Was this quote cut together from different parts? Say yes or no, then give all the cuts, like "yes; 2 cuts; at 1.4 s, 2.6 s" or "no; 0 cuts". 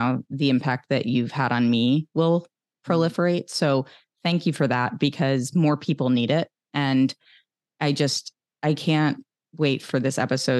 no; 0 cuts